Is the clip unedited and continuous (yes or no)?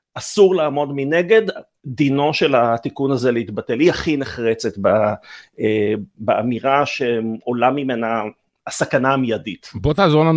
yes